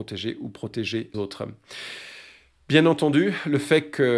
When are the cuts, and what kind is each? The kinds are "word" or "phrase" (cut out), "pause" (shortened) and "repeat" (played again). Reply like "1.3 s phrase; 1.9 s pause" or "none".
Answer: 1.1 s word